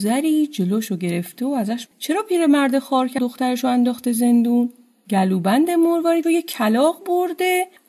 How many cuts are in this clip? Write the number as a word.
three